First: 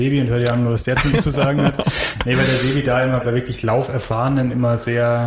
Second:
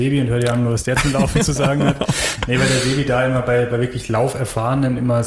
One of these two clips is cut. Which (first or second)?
first